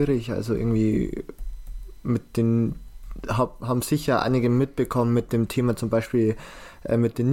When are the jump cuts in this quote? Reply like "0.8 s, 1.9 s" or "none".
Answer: none